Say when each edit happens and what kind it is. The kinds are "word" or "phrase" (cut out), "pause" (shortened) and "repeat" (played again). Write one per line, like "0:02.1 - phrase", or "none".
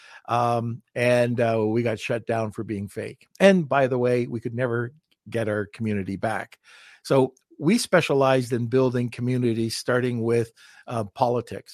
none

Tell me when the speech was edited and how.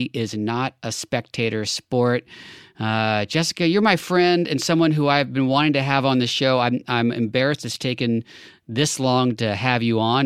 none

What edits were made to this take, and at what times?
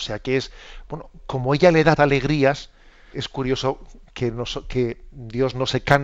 0:01.2 - word
0:02.0 - word
0:03.1 - word

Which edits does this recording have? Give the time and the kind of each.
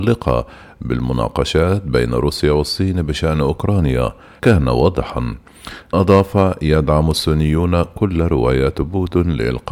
0:04.4 - phrase
0:05.9 - word

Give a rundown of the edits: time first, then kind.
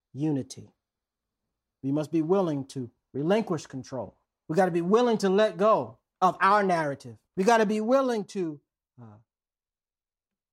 0:04.2 - pause
0:06.1 - pause
0:07.3 - pause

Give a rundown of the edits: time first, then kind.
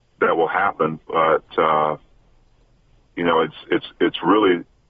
0:01.0 - pause

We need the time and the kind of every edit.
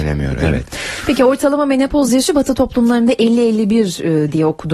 none

